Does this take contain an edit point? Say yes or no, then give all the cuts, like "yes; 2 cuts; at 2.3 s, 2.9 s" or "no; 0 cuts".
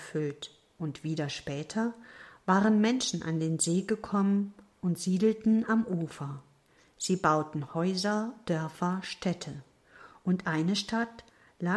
no; 0 cuts